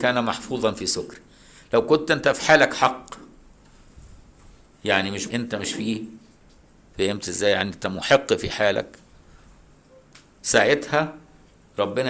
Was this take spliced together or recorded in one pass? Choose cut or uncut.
cut